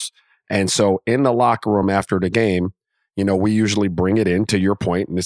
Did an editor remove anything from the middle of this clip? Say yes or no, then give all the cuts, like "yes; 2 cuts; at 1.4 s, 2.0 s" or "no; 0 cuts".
no; 0 cuts